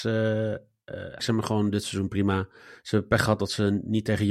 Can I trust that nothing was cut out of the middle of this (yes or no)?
no